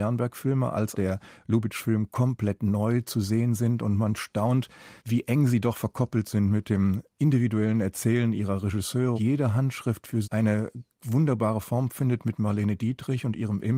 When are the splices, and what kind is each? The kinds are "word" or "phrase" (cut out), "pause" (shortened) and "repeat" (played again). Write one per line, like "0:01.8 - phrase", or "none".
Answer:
0:00.9 - word
0:05.0 - pause
0:09.2 - word
0:10.2 - word